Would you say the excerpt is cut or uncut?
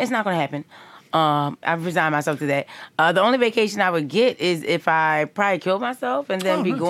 cut